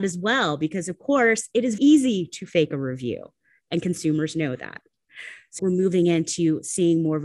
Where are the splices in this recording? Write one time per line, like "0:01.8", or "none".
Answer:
0:01.8
0:05.6